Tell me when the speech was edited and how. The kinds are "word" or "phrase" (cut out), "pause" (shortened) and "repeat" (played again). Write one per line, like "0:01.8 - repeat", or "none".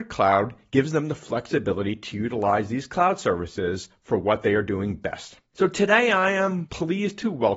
0:05.5 - pause